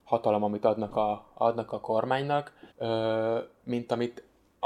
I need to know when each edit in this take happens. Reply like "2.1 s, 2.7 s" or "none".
2.7 s